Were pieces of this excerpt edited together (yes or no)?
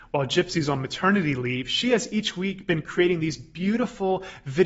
no